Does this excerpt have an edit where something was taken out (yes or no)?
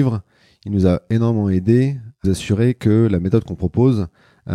yes